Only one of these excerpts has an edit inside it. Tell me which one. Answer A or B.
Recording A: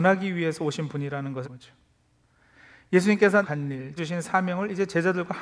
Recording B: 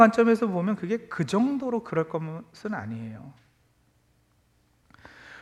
A